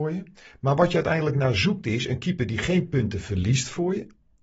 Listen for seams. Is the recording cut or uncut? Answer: uncut